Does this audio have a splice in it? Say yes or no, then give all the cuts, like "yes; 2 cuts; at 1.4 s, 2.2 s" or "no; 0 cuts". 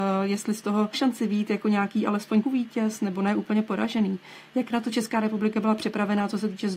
yes; 2 cuts; at 0.9 s, 2.4 s